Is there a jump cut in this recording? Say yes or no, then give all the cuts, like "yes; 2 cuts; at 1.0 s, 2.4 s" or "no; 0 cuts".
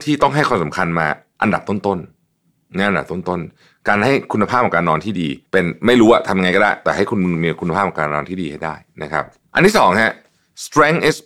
yes; 1 cut; at 5.5 s